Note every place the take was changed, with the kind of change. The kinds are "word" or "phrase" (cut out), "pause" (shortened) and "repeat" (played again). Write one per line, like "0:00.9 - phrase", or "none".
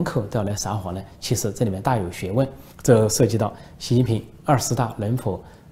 0:02.7 - pause